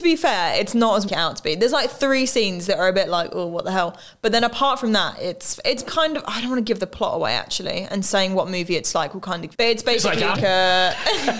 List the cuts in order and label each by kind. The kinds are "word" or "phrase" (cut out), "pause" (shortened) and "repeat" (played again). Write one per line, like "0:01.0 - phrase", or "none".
0:01.1 - phrase
0:05.9 - word
0:09.5 - phrase
0:10.4 - phrase